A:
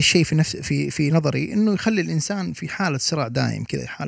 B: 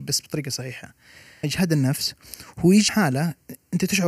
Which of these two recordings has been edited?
B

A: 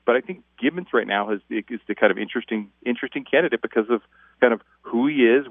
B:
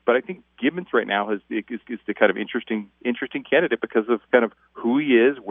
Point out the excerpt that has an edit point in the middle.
B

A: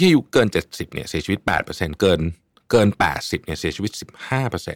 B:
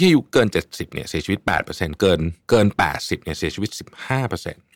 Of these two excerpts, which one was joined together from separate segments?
B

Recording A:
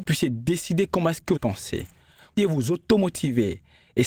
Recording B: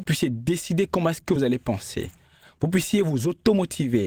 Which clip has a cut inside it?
A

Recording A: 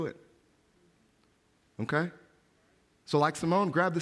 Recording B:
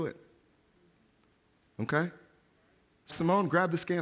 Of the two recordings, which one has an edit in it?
B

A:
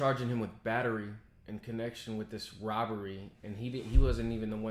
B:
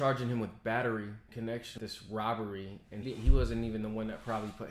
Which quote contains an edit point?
B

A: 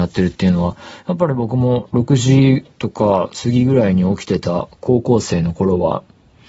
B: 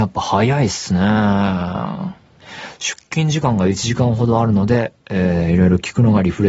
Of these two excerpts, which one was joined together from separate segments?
A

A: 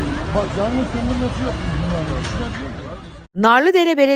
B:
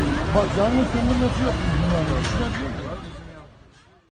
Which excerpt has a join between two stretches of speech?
A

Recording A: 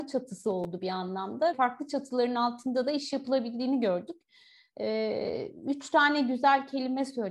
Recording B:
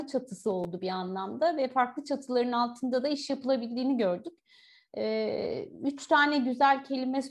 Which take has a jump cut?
A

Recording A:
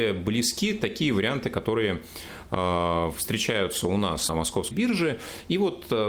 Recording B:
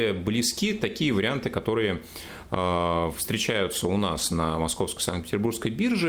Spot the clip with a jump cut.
A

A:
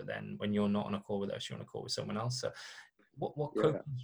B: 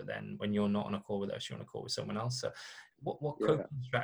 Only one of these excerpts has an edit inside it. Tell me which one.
B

